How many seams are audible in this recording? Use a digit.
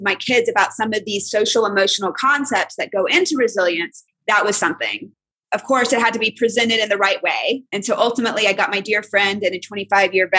0